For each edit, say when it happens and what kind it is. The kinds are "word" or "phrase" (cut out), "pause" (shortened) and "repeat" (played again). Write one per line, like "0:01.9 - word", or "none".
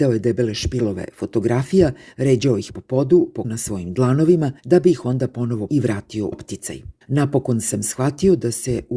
0:03.4 - word
0:04.6 - pause
0:05.7 - word
0:06.3 - word
0:07.0 - pause